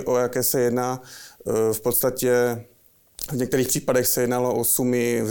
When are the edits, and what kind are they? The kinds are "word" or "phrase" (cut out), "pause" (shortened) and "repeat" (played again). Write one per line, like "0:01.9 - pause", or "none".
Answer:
none